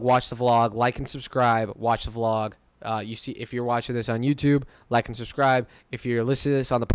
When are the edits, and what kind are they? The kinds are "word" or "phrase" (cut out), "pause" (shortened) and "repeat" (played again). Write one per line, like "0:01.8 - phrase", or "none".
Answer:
none